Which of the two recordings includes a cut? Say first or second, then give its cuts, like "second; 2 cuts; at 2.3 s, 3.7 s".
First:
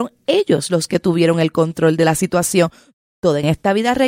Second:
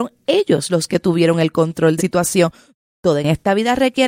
second; 1 cut; at 2.0 s